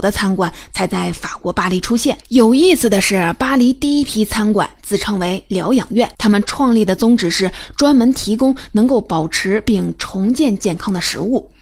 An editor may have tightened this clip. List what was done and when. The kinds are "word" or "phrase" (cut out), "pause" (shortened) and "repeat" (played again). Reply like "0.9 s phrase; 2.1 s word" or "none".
2.2 s pause; 6.1 s pause